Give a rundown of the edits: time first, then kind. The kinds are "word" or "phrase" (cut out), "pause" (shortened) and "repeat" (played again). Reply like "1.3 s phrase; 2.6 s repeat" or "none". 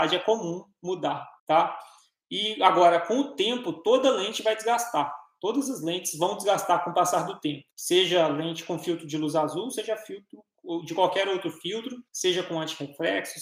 1.4 s pause; 7.7 s pause; 12.1 s pause